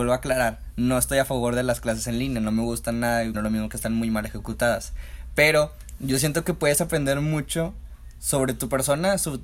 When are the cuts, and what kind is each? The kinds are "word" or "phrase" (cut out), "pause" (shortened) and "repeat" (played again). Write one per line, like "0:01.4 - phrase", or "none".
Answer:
0:03.3 - word